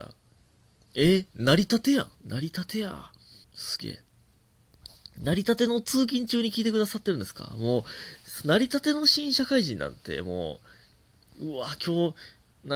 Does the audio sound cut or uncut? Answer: cut